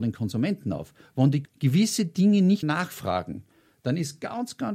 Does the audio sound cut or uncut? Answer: cut